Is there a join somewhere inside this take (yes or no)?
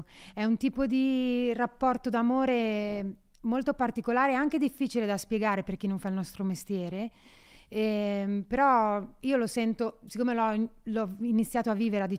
no